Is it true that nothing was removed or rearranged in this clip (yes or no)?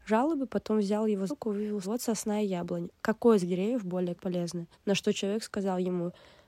no